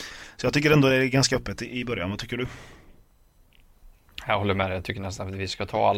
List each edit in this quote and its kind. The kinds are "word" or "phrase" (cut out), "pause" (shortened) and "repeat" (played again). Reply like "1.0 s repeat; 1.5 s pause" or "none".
none